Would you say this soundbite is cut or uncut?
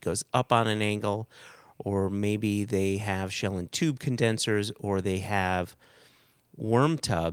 uncut